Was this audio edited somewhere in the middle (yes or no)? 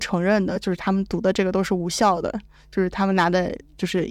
no